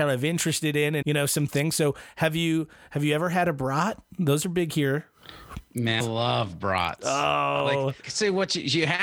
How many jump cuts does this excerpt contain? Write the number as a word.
three